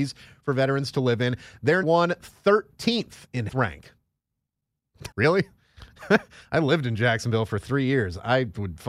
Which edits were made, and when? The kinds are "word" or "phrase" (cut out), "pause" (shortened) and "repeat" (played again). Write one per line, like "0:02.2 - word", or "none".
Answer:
0:01.8 - word
0:03.5 - word
0:05.1 - pause